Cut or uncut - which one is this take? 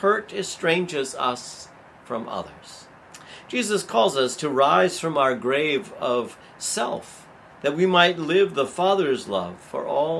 uncut